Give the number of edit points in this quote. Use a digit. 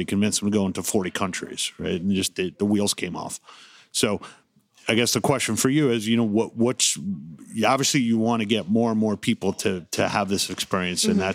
0